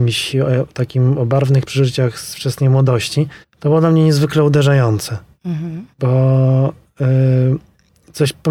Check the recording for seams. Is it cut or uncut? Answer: cut